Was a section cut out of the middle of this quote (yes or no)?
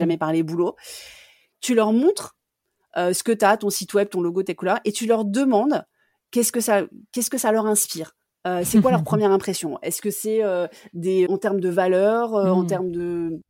yes